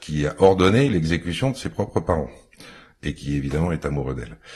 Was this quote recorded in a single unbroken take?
yes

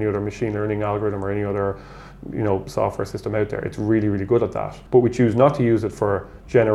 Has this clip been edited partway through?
yes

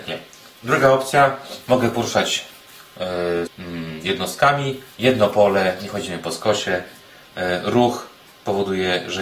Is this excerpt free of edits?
no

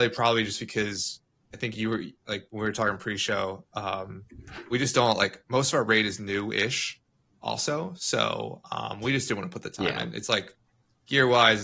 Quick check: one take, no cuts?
yes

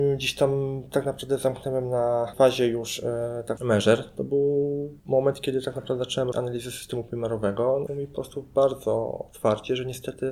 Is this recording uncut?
no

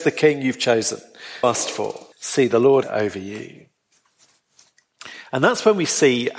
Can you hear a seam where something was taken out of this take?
yes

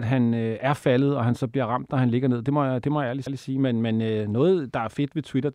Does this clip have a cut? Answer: yes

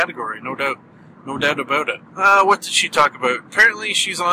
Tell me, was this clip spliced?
yes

